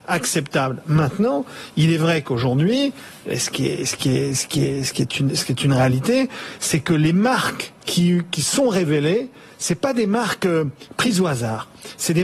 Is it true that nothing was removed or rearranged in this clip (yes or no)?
no